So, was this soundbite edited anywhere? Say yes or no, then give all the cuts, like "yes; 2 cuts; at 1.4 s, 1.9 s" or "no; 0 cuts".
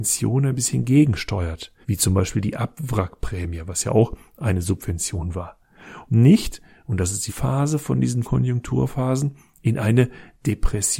yes; 4 cuts; at 1.8 s, 6.1 s, 7.3 s, 8.2 s